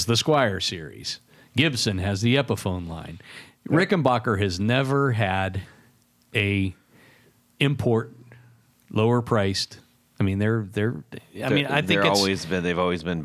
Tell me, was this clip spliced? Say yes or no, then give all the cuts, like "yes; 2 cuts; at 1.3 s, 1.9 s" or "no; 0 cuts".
no; 0 cuts